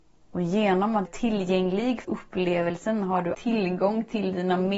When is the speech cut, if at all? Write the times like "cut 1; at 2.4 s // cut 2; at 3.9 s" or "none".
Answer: cut 1; at 1.1 s // cut 2; at 2.0 s // cut 3; at 3.3 s